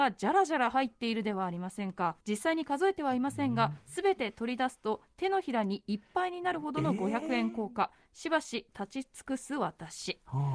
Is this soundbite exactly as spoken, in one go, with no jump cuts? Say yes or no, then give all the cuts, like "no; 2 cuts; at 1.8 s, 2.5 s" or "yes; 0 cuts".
no; 1 cut; at 2.2 s